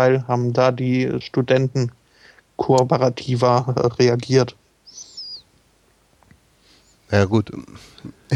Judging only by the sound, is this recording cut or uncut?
uncut